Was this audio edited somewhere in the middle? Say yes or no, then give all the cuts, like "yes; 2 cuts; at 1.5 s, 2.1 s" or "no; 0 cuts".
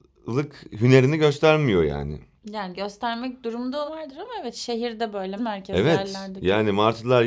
yes; 3 cuts; at 2.4 s, 3.9 s, 5.4 s